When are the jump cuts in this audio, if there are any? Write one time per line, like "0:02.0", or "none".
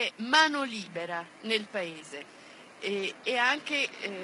0:01.3